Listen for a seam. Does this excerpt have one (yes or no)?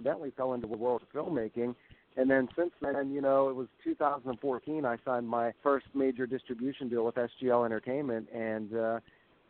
yes